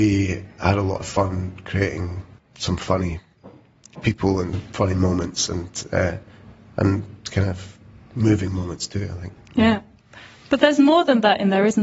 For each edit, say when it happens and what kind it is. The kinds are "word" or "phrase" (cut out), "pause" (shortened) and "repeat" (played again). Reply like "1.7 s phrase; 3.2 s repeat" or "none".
none